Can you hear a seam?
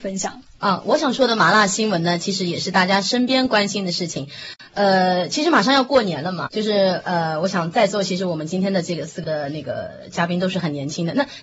yes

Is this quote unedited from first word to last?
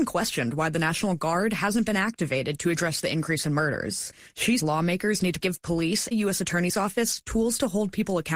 no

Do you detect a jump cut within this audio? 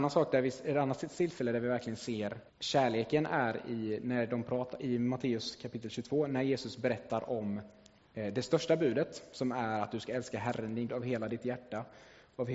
yes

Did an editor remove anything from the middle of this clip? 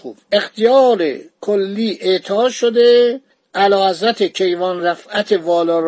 no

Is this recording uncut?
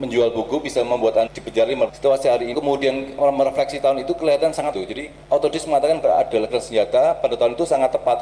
no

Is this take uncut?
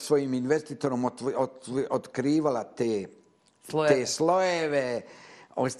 yes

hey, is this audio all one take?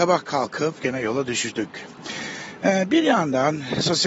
yes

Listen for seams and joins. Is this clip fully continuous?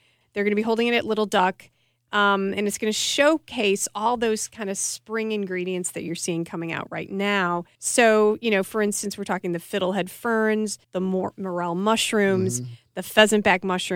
no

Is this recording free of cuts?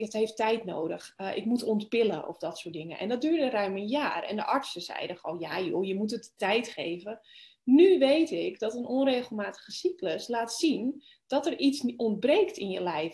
yes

